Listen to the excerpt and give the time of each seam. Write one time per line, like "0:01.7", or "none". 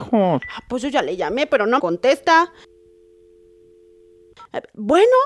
0:01.8